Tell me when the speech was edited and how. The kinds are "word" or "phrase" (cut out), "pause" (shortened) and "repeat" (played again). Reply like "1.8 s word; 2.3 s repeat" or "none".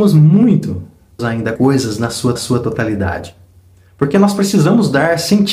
1.2 s word; 1.6 s word; 2.4 s repeat